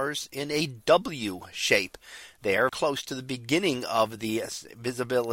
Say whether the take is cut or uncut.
cut